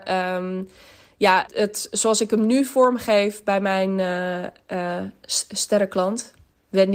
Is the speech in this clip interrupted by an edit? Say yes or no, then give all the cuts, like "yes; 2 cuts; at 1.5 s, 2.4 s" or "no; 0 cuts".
yes; 1 cut; at 1.5 s